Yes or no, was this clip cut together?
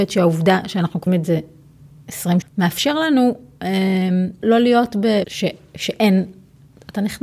yes